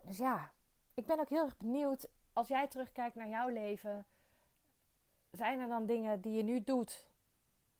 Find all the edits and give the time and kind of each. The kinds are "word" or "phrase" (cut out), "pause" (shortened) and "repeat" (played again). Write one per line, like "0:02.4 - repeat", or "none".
none